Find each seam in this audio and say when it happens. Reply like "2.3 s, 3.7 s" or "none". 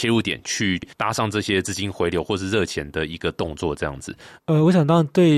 0.9 s